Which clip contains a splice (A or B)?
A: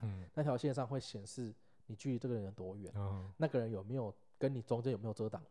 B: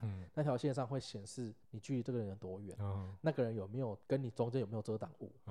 B